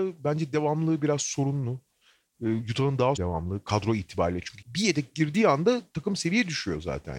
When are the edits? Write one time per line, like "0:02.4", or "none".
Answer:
0:03.2
0:04.6